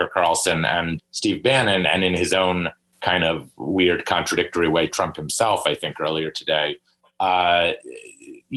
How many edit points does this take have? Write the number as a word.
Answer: one